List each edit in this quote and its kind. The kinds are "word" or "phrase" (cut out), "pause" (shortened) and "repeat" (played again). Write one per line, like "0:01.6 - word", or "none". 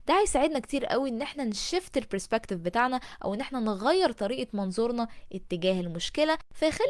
none